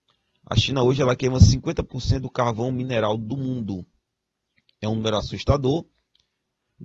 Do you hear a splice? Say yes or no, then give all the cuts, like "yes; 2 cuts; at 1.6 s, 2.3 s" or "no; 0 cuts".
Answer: no; 0 cuts